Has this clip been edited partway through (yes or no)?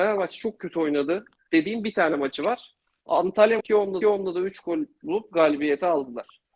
yes